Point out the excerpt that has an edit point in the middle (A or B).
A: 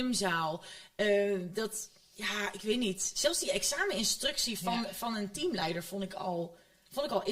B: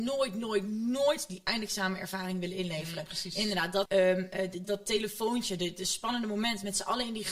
B